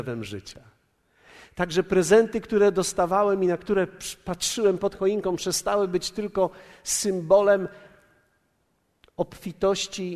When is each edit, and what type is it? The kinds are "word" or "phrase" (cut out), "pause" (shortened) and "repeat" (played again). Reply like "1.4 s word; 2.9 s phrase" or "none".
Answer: none